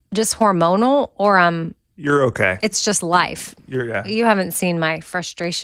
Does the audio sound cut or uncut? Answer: uncut